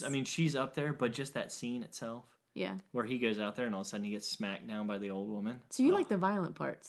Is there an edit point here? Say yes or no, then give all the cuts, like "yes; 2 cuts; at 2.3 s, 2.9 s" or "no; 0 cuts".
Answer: no; 0 cuts